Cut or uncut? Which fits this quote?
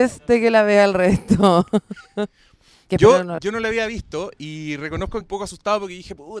cut